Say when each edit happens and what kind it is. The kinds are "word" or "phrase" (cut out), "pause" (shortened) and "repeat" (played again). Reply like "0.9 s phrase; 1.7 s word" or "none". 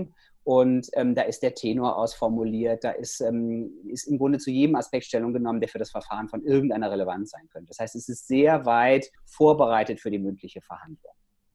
9.2 s pause